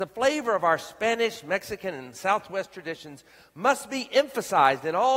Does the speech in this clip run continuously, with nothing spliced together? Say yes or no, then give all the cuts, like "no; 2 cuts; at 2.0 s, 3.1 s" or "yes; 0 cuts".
yes; 0 cuts